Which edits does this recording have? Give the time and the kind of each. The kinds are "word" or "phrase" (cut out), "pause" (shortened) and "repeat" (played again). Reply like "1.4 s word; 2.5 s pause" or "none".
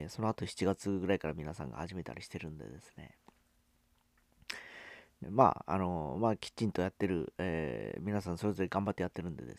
5.2 s word

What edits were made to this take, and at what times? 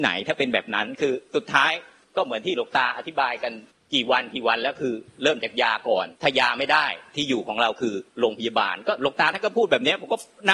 2.0 s pause; 3.7 s pause; 6.1 s pause; 8.1 s pause

